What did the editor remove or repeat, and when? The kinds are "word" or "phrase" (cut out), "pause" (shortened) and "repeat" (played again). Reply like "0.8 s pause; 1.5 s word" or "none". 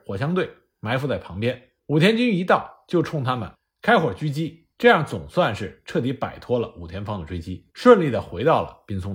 1.8 s pause; 4.7 s pause; 7.7 s pause

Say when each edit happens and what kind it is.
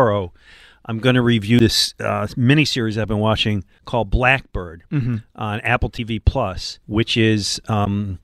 6.8 s pause

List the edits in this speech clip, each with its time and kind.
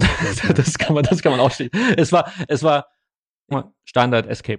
3.5 s word

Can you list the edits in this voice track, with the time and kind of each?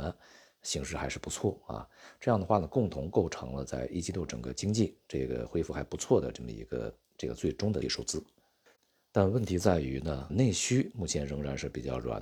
7.8 s word; 10.3 s word

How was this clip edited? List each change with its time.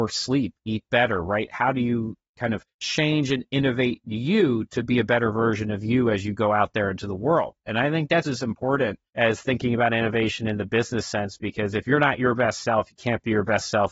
2.7 s pause; 8.2 s word; 9.1 s pause

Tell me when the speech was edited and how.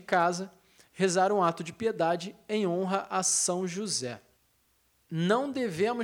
none

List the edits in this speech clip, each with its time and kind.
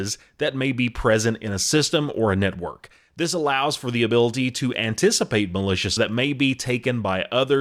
6.0 s word

